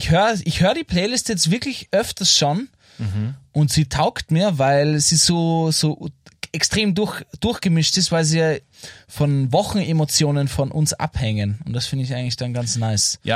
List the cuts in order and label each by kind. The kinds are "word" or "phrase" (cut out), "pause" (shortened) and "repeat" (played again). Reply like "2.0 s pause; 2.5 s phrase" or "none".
none